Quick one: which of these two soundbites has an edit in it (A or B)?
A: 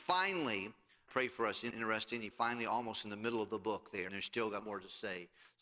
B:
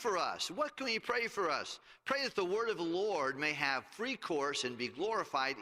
A